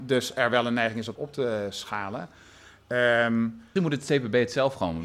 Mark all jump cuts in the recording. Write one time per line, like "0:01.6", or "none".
0:01.2
0:03.8